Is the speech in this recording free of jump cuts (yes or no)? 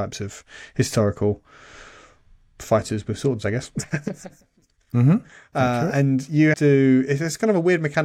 no